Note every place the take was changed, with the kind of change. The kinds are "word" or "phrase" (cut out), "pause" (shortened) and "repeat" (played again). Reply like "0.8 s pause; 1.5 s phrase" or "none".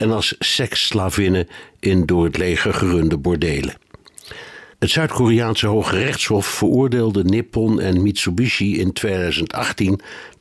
4.7 s pause